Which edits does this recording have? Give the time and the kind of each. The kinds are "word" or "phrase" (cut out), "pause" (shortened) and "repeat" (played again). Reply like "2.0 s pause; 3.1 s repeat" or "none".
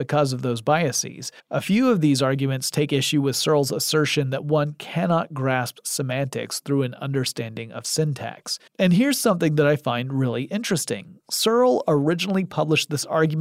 1.4 s pause; 8.7 s pause